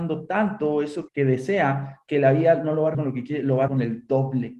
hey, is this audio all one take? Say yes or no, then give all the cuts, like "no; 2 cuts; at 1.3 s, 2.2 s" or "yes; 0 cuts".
no; 3 cuts; at 1.1 s, 2.9 s, 3.7 s